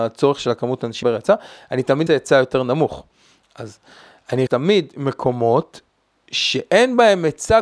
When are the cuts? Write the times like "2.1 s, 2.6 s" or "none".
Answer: 1.0 s, 2.1 s, 4.5 s